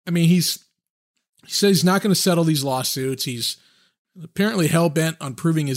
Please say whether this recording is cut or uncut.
uncut